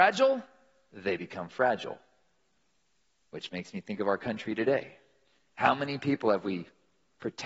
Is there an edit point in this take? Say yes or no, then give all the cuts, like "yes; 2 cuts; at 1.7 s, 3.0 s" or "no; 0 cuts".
no; 0 cuts